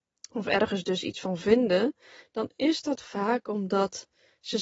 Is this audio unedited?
yes; 0 cuts

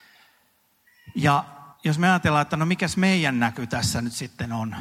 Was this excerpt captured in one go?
no; 1 cut; at 1.7 s

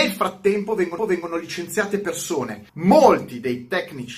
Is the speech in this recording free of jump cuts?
no; 2 cuts; at 1.0 s, 2.7 s

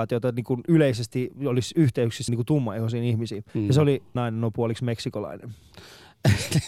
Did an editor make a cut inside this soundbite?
yes; 3 cuts; at 2.3 s, 3.5 s, 4.2 s

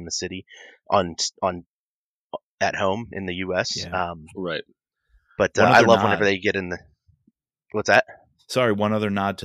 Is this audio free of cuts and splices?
yes; 0 cuts

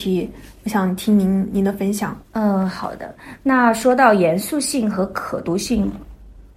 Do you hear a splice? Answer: yes; 1 cut; at 2.2 s

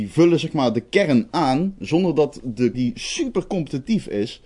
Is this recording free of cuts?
no; 1 cut; at 2.7 s

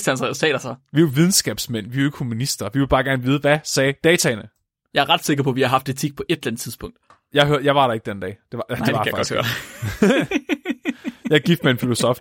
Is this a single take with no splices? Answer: yes; 0 cuts

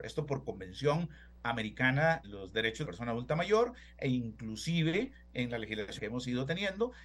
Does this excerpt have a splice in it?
yes; 3 cuts; at 2.2 s, 2.8 s, 6.0 s

